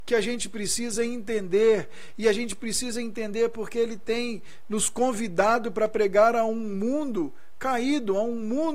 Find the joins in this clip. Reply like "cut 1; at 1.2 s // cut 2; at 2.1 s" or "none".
none